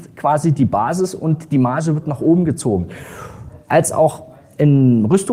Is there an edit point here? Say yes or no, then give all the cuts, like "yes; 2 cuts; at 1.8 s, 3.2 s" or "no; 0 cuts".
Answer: no; 0 cuts